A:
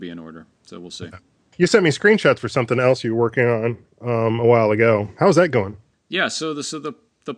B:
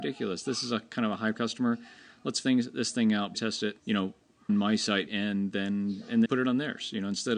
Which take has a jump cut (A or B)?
B